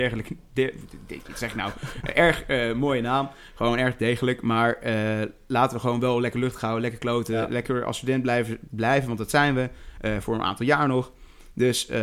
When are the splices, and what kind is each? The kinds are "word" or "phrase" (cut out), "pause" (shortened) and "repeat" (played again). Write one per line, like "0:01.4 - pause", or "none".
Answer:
none